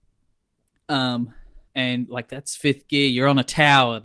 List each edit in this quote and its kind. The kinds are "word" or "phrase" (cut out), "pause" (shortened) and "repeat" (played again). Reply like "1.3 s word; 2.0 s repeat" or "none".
1.7 s pause